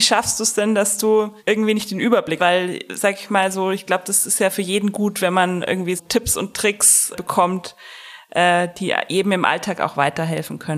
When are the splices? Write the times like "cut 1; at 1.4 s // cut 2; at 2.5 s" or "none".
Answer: cut 1; at 1.4 s // cut 2; at 2.4 s // cut 3; at 6.0 s // cut 4; at 7.1 s